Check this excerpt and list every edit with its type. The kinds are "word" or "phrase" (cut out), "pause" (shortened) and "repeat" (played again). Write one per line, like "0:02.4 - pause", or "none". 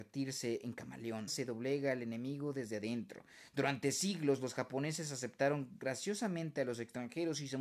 0:01.3 - phrase